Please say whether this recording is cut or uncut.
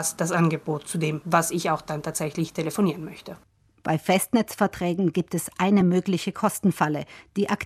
uncut